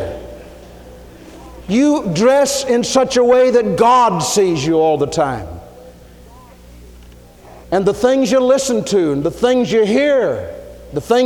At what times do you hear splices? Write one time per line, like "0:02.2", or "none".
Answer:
0:07.6